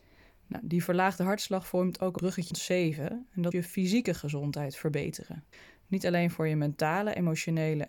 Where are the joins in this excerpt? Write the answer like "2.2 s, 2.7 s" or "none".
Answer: 2.2 s, 2.5 s, 3.5 s, 5.5 s